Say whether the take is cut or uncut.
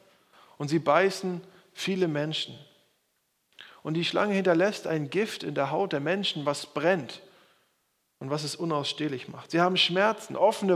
uncut